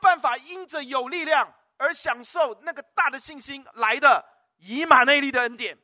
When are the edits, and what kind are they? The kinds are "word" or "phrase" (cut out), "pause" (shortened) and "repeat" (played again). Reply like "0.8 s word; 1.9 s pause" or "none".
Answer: none